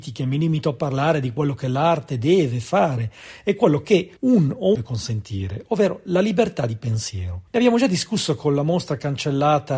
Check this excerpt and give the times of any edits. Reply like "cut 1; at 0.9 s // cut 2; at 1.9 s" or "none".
cut 1; at 4.2 s // cut 2; at 4.7 s // cut 3; at 7.5 s